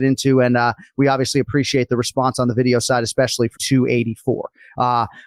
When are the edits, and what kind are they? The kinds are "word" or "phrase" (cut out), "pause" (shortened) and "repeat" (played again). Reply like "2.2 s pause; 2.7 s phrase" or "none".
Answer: 3.6 s word